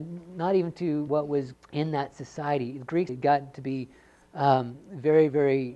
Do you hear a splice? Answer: yes; 3 cuts; at 1.1 s, 1.5 s, 3.1 s

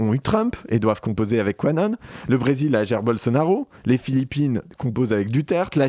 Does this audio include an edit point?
no; 0 cuts

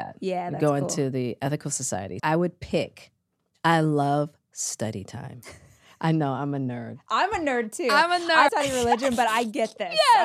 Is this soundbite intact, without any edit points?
no; 2 cuts; at 2.2 s, 8.5 s

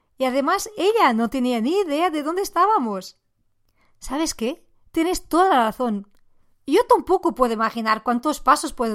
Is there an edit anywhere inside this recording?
no; 0 cuts

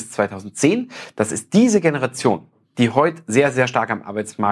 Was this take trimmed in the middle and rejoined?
no; 0 cuts

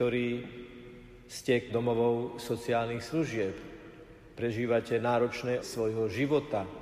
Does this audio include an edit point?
yes; 2 cuts; at 1.7 s, 5.6 s

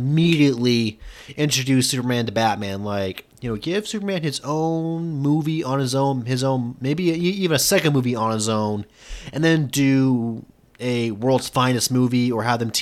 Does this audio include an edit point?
no; 0 cuts

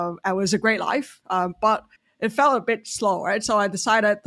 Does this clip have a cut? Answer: yes; 1 cut; at 2.0 s

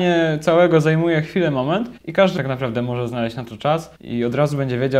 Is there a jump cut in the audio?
yes; 3 cuts; at 2.0 s, 2.4 s, 4.0 s

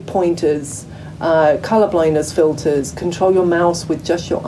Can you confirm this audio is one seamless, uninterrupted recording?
yes; 0 cuts

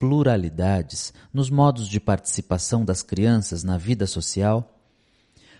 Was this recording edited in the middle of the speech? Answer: no; 0 cuts

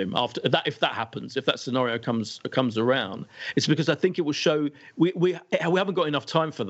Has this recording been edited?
no; 0 cuts

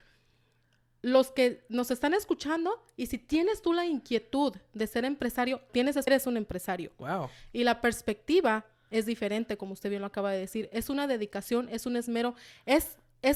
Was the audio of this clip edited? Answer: yes; 2 cuts; at 5.7 s, 6.1 s

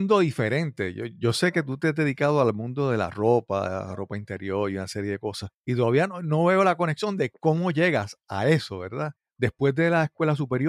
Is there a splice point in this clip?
yes; 2 cuts; at 5.6 s, 9.2 s

